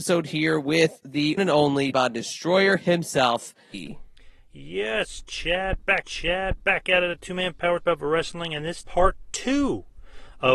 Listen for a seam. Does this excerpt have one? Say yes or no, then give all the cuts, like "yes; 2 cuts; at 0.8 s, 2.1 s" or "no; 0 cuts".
yes; 7 cuts; at 1.4 s, 1.9 s, 3.7 s, 6.0 s, 7.1 s, 7.8 s, 8.8 s